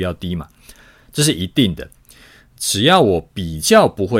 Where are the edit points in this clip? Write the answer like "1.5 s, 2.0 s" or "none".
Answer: none

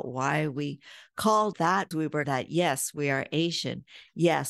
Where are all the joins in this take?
1.5 s, 1.9 s, 2.2 s

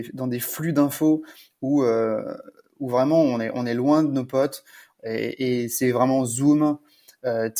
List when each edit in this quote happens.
none

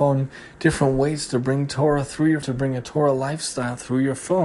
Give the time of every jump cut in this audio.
2.4 s

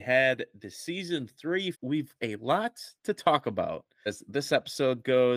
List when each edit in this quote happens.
1.7 s, 2.2 s, 3.0 s, 4.1 s

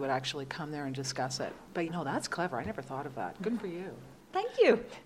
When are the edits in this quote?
1.9 s

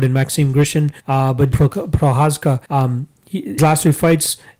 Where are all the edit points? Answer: 1.0 s, 1.5 s, 2.7 s, 3.6 s

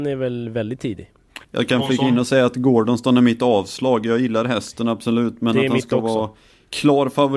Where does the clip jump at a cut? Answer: 1.4 s

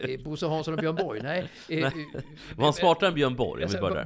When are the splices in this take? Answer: none

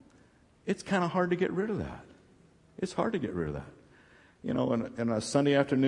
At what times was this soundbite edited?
none

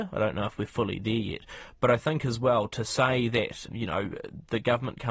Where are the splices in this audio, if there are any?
3.7 s

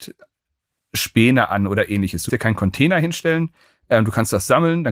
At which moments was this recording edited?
2.3 s

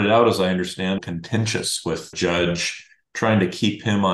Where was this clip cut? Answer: 1.0 s, 2.1 s

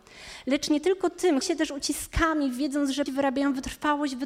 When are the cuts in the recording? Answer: 1.4 s, 3.1 s

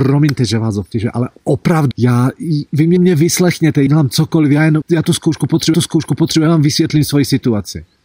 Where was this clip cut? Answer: 1.9 s, 3.0 s, 3.9 s, 4.8 s, 5.7 s

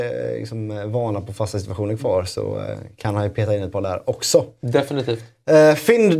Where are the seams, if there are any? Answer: none

